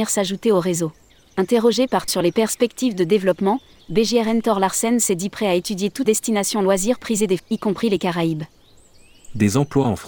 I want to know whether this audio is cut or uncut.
cut